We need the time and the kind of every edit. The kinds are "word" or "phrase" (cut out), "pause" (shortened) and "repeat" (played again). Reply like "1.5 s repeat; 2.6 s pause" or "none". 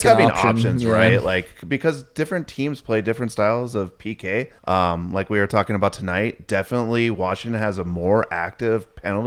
4.6 s pause